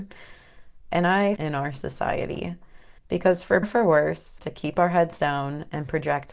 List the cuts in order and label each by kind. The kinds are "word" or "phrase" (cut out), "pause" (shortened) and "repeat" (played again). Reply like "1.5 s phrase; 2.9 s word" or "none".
1.4 s phrase; 3.0 s pause; 3.6 s word; 4.4 s phrase